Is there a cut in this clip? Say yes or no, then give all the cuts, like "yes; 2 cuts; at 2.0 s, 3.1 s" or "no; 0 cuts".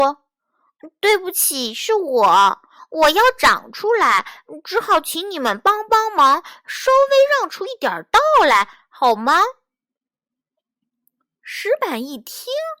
no; 0 cuts